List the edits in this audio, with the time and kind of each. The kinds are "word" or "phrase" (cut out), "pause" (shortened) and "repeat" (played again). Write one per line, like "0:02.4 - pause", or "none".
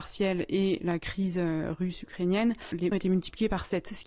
0:02.9 - word